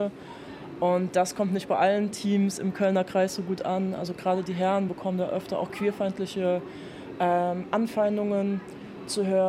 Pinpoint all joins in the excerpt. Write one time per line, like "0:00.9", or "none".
none